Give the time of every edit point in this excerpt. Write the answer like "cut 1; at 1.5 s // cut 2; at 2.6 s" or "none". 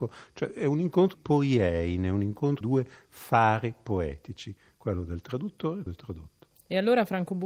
cut 1; at 1.1 s // cut 2; at 2.6 s // cut 3; at 5.9 s